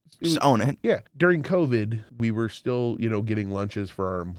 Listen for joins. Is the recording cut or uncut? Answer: cut